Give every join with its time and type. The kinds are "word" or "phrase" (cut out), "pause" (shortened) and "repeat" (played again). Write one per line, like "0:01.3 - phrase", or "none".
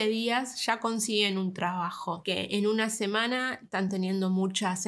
none